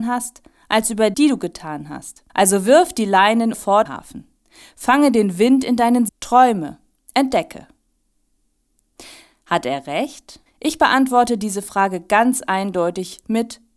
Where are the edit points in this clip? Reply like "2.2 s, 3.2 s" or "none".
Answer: 1.1 s, 2.3 s, 3.5 s, 3.9 s, 6.1 s, 10.5 s